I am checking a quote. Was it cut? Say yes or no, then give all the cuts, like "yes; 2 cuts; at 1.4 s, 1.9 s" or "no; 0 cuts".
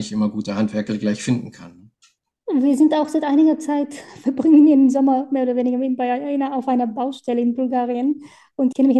no; 0 cuts